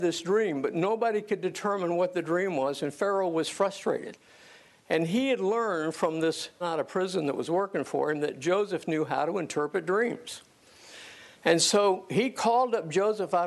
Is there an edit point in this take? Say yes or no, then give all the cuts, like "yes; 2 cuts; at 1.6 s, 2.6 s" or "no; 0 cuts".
yes; 1 cut; at 6.6 s